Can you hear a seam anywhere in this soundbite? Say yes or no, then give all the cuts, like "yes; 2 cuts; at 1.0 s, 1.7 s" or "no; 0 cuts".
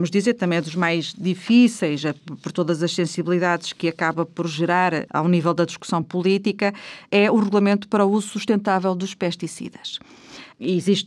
no; 0 cuts